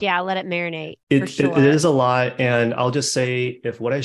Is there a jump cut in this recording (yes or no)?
yes